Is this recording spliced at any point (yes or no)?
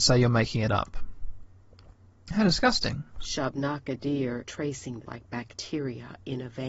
yes